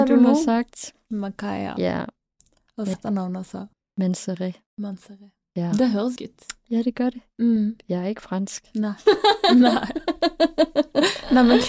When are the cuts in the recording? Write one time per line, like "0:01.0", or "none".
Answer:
0:02.9
0:03.7
0:06.2

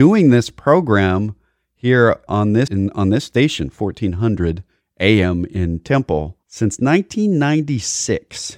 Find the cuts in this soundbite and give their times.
0:02.3
0:02.7
0:04.8

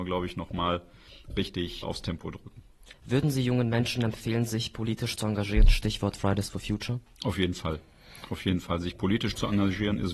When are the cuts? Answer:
0:01.8
0:02.9

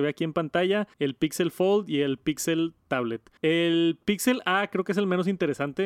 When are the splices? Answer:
0:00.9
0:03.4

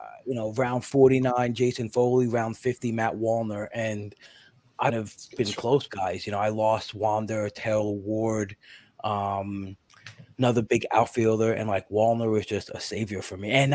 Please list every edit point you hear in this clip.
0:04.9
0:05.9
0:10.3

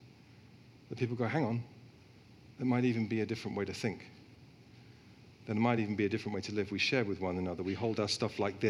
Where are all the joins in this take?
none

